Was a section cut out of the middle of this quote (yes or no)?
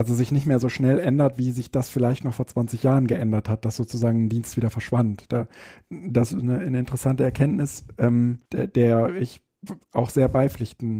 yes